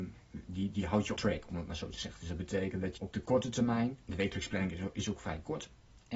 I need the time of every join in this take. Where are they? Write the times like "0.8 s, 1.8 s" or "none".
1.2 s, 3.0 s, 4.0 s